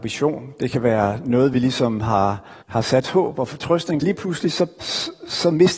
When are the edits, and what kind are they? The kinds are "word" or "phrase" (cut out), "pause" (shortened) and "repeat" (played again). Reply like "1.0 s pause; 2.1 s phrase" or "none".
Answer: 2.6 s pause; 3.0 s word; 4.0 s phrase; 4.8 s word

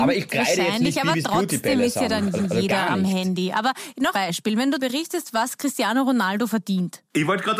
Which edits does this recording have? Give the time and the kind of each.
2.4 s repeat; 4.1 s word; 4.8 s word

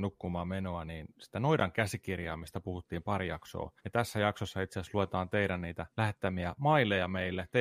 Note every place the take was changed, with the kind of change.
3.8 s pause; 5.9 s pause

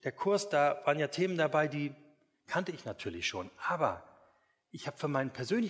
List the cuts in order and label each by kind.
none

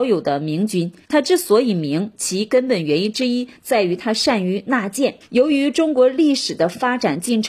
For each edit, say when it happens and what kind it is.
1.0 s pause; 5.2 s pause

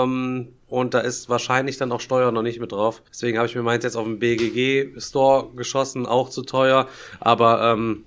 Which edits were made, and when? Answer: 3.1 s pause

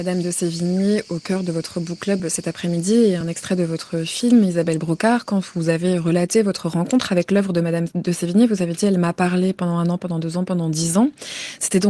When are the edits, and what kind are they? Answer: none

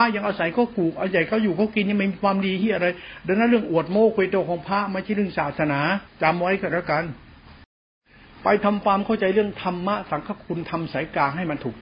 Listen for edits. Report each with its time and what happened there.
6.1 s pause

